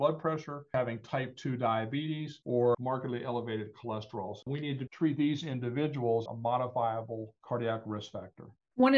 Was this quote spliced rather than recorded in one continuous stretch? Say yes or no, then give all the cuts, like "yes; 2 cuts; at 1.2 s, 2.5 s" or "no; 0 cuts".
yes; 1 cut; at 6.3 s